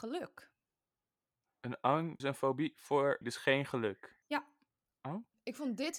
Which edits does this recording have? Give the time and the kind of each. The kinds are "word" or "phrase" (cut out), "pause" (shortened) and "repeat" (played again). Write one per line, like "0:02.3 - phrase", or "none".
0:02.2 - word
0:03.2 - word